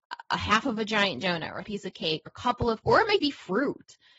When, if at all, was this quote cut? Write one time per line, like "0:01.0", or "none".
0:01.6
0:02.3
0:02.8
0:03.2